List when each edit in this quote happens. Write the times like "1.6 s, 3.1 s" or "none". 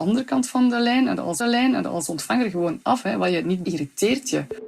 1.4 s, 3.6 s